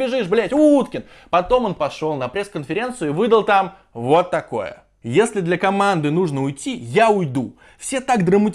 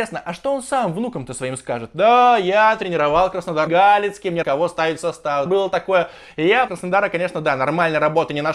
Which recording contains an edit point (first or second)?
second